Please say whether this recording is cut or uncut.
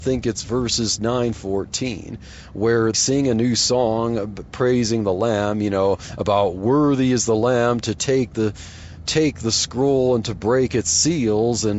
cut